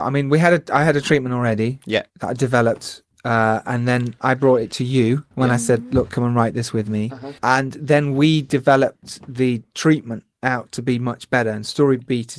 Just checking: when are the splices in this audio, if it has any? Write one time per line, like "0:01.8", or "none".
0:02.1
0:05.3
0:07.4